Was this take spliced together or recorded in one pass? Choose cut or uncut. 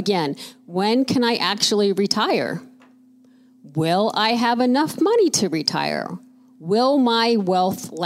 uncut